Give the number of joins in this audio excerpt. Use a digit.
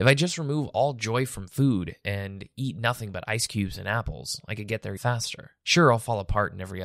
1